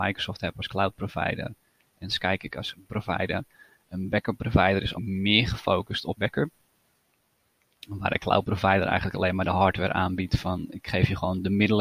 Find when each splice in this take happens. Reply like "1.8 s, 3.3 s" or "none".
2.8 s, 4.9 s, 6.2 s